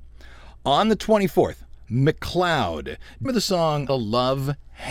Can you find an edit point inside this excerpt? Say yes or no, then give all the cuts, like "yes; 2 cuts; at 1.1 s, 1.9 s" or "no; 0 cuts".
yes; 3 cuts; at 1.8 s, 3.2 s, 3.9 s